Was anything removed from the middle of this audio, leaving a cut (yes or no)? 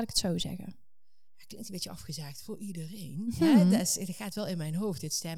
no